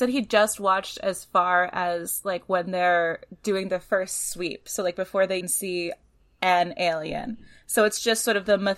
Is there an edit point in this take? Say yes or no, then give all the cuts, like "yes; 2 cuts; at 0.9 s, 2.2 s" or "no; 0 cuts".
yes; 1 cut; at 5.4 s